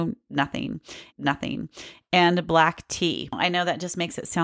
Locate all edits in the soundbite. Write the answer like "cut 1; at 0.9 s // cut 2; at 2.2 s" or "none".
cut 1; at 1.1 s